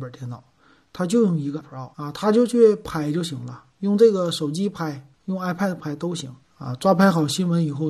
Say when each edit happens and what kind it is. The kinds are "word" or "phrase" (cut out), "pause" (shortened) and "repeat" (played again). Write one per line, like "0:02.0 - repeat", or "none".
0:01.6 - word
0:01.9 - pause
0:05.1 - pause
0:05.8 - word
0:06.4 - pause

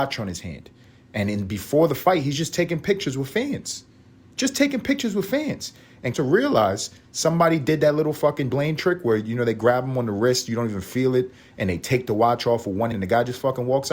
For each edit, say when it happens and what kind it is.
0:06.1 - word
0:08.5 - word
0:12.9 - word

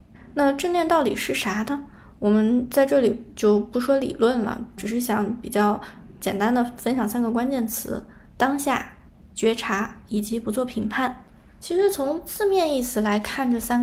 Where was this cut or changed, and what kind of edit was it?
0:04.8 - word

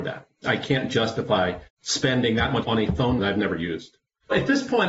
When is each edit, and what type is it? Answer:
0:01.7 - pause
0:02.6 - word
0:03.2 - word

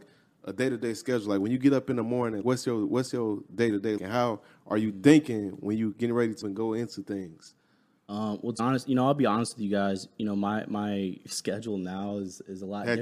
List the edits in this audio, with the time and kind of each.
0:02.4 - word
0:04.0 - word
0:06.4 - word
0:08.6 - word

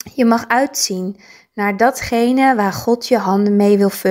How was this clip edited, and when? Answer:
none

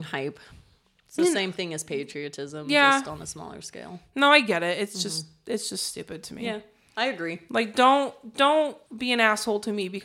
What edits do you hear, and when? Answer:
0:08.9 - pause

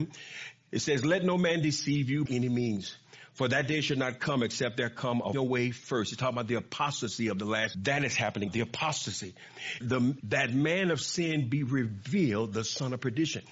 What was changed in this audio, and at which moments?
0:02.3 - word
0:05.3 - word
0:07.7 - word
0:08.5 - word
0:09.8 - word
0:10.2 - word

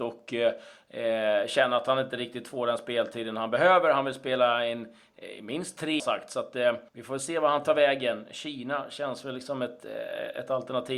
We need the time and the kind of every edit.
0:06.0 - phrase
0:06.9 - pause

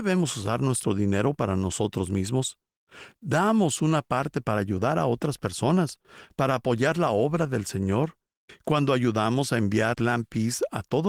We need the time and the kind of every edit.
0:09.9 - word

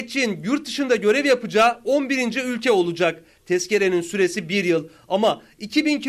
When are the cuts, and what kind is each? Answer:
none

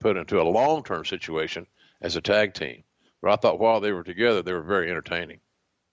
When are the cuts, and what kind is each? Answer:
none

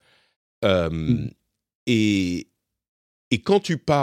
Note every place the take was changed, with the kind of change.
none

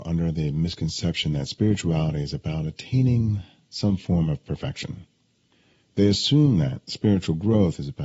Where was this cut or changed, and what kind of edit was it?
none

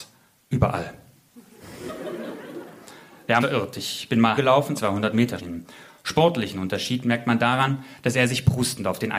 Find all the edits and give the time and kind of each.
0:03.4 - word
0:04.4 - word
0:04.8 - word
0:05.4 - word

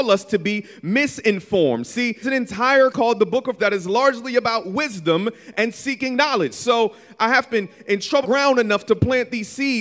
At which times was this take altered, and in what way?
0:02.2 - word
0:02.9 - phrase
0:03.6 - word
0:07.5 - phrase
0:08.2 - word

